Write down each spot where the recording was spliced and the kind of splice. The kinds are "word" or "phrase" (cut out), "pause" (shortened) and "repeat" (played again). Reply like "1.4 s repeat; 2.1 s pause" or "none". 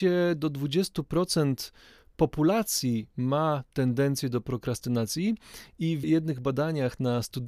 6.0 s word